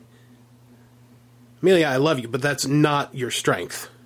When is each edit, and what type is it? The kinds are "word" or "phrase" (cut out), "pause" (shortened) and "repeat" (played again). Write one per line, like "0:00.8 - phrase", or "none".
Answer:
none